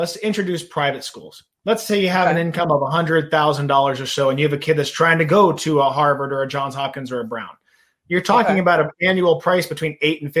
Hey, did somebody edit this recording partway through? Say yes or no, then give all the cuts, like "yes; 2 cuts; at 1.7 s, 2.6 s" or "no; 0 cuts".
no; 0 cuts